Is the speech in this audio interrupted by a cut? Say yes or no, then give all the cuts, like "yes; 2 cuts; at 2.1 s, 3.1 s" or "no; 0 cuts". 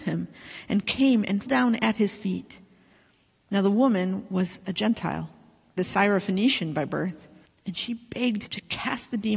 yes; 4 cuts; at 1.5 s, 5.8 s, 7.4 s, 8.5 s